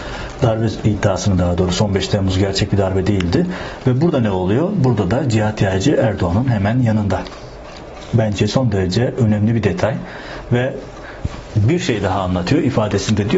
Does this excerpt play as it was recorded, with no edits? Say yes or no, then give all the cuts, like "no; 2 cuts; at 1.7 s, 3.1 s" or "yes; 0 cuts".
yes; 0 cuts